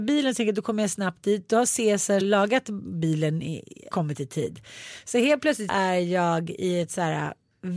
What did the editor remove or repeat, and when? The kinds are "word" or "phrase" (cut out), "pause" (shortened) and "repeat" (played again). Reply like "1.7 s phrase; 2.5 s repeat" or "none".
2.2 s phrase; 3.9 s phrase; 5.7 s word